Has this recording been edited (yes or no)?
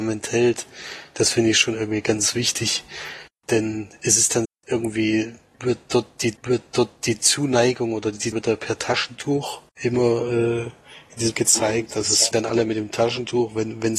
yes